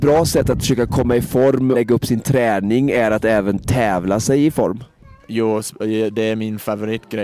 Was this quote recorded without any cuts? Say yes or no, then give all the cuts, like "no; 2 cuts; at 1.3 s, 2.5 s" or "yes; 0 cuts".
no; 1 cut; at 1.7 s